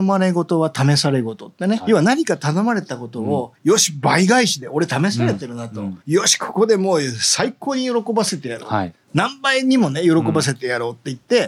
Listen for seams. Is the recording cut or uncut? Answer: cut